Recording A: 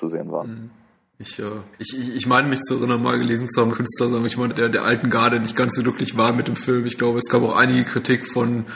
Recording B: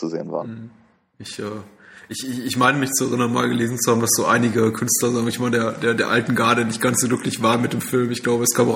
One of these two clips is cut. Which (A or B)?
A